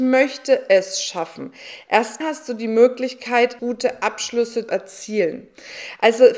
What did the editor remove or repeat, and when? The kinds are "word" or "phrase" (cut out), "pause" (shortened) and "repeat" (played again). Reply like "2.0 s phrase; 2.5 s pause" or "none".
2.2 s word; 3.6 s word; 4.7 s word